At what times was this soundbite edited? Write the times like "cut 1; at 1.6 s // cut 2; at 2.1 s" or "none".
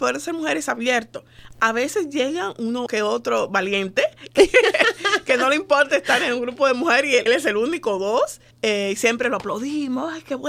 cut 1; at 7.3 s // cut 2; at 8.5 s